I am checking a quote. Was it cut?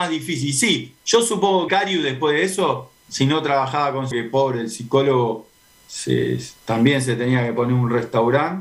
yes; 2 cuts; at 1.7 s, 4.1 s

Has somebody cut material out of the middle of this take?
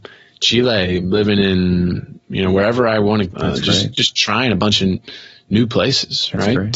yes; 2 cuts; at 2.2 s, 3.3 s

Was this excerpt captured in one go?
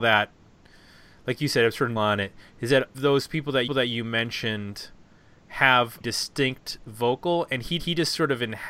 no; 5 cuts; at 2.0 s, 2.9 s, 3.7 s, 6.0 s, 7.8 s

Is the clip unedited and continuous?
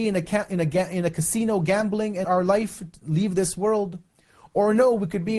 no; 1 cut; at 2.2 s

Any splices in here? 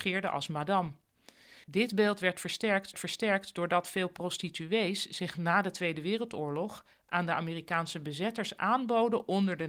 yes; 2 cuts; at 1.6 s, 2.9 s

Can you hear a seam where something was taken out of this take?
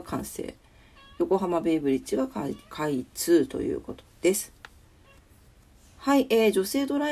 no; 0 cuts

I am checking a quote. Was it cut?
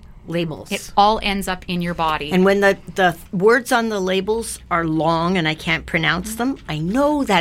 no; 0 cuts

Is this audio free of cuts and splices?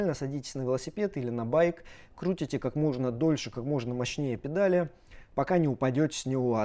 yes; 0 cuts

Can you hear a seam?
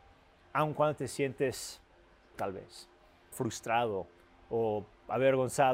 yes; 2 cuts; at 2.3 s, 3.3 s

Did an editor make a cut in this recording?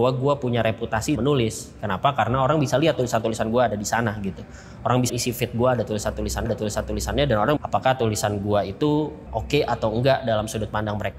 yes; 5 cuts; at 1.1 s, 5.1 s, 6.4 s, 7.6 s, 9.3 s

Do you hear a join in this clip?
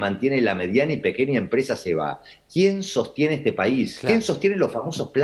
no; 0 cuts

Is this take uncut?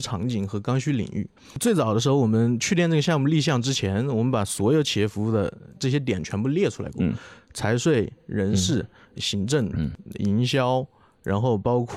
yes; 0 cuts

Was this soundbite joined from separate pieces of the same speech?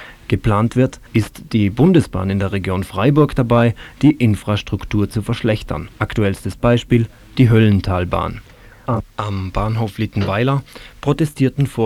yes; 2 cuts; at 1.1 s, 5.9 s

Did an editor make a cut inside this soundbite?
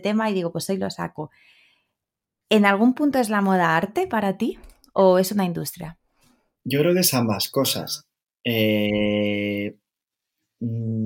no; 0 cuts

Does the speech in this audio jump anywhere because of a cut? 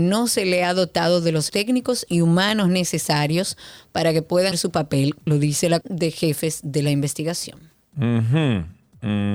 yes; 5 cuts; at 1.5 s, 2.1 s, 4.5 s, 5.3 s, 5.8 s

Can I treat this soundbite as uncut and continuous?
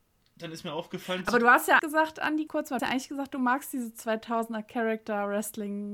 no; 3 cuts; at 1.8 s, 2.5 s, 2.8 s

